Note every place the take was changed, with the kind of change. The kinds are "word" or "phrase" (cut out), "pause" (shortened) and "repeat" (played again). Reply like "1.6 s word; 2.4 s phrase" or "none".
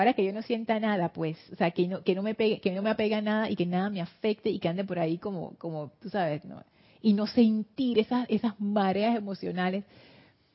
none

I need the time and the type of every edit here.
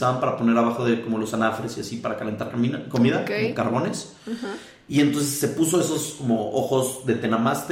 none

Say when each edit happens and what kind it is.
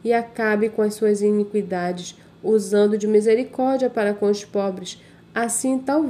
none

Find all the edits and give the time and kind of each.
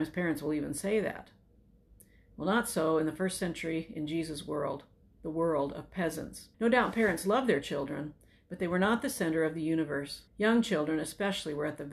6.5 s pause; 10.3 s pause

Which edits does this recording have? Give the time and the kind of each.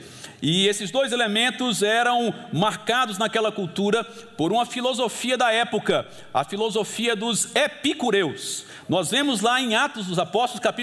none

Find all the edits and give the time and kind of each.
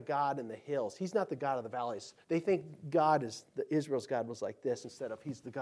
2.2 s pause

